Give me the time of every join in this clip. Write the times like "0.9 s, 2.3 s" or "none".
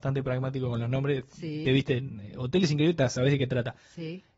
1.7 s